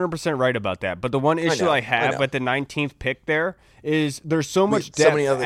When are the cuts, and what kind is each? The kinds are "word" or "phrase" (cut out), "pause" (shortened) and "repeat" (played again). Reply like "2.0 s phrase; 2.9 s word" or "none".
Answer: none